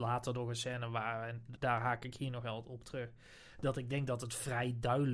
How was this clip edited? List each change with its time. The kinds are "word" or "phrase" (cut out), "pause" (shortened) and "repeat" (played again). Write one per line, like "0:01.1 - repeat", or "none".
0:01.6 - word